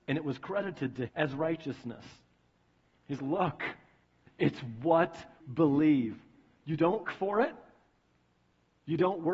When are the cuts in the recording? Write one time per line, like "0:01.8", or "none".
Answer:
0:01.1
0:03.2
0:04.3
0:05.4
0:07.0